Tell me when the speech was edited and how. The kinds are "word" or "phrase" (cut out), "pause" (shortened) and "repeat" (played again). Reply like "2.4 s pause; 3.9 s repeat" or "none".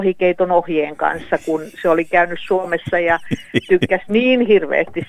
none